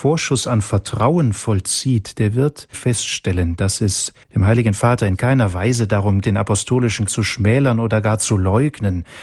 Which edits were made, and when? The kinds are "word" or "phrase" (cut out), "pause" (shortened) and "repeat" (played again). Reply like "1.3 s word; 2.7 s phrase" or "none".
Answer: 2.7 s word; 4.2 s pause; 6.2 s word; 7.1 s word